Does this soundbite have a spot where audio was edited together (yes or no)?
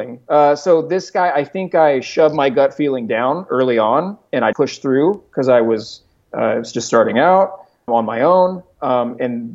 yes